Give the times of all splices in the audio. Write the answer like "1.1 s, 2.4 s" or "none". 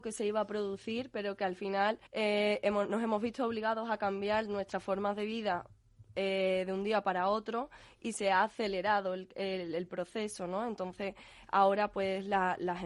2.1 s